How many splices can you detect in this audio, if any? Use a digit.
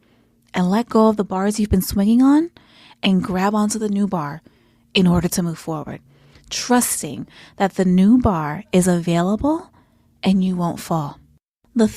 0